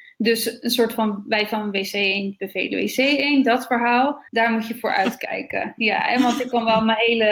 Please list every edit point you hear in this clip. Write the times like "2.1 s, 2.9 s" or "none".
4.3 s